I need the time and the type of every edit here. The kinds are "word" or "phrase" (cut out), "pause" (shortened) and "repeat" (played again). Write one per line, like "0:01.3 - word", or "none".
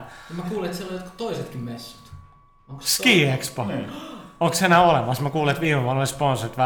none